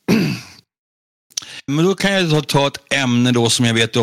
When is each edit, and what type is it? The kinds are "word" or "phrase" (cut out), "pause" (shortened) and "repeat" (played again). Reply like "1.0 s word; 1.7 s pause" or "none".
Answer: 1.7 s word